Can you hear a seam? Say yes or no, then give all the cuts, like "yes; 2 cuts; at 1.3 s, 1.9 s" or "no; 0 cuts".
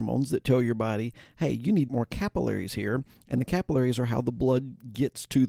yes; 1 cut; at 1.9 s